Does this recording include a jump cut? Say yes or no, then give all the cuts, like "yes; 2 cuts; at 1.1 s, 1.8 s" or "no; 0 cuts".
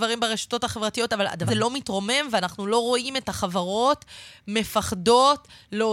yes; 1 cut; at 1.5 s